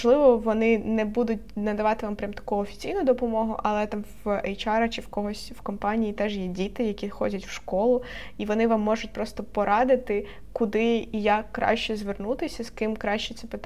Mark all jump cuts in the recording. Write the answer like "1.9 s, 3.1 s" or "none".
none